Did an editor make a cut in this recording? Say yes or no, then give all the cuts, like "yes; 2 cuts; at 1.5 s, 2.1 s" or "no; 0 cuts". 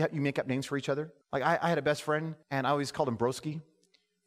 yes; 2 cuts; at 1.2 s, 2.4 s